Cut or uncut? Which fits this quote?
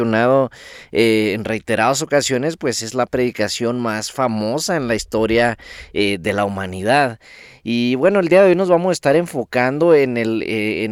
uncut